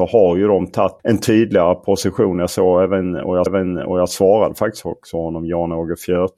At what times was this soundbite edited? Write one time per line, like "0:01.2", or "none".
0:01.0
0:03.5